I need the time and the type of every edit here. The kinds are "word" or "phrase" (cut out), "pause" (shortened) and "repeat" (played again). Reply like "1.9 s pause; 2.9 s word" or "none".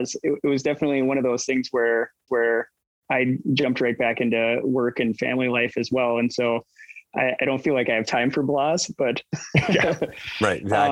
2.3 s repeat